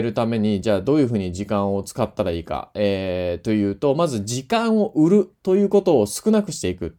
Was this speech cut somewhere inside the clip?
no; 0 cuts

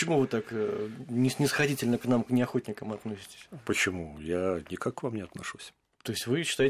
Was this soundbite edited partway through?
no; 0 cuts

